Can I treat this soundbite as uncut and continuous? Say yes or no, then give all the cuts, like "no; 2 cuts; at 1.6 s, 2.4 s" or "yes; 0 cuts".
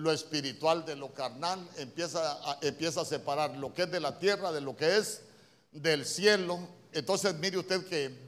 yes; 0 cuts